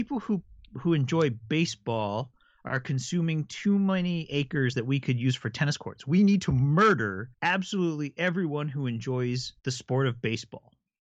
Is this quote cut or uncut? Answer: cut